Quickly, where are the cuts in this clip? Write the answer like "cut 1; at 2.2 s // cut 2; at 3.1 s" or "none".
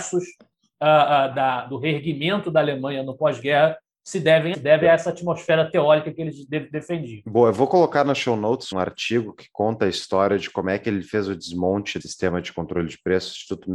cut 1; at 1.3 s // cut 2; at 4.5 s // cut 3; at 8.7 s // cut 4; at 12.0 s